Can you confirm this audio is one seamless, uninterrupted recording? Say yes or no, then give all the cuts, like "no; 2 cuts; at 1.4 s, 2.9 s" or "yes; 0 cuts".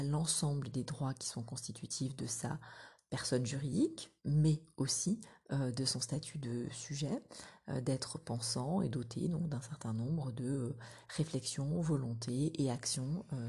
no; 1 cut; at 4.2 s